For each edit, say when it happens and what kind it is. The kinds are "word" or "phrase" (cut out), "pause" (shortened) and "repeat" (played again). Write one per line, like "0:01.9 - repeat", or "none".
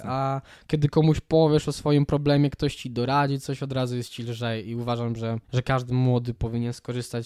0:05.4 - pause

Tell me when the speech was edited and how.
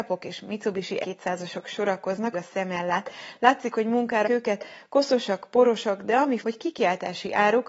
0:01.0 - word
0:02.3 - word
0:04.2 - word
0:06.4 - word

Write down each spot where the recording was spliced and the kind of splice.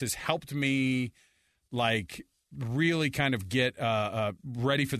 none

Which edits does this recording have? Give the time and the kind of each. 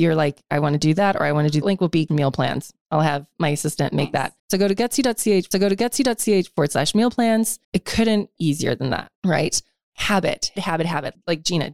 0:01.6 - phrase
0:02.1 - phrase
0:04.4 - pause
0:05.5 - repeat
0:07.6 - pause
0:08.4 - word
0:09.2 - pause
0:10.6 - word

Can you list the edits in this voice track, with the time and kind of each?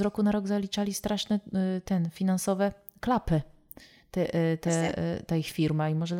none

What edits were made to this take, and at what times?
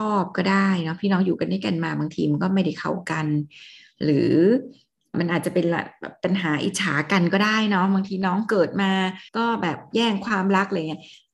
0:09.3 - pause

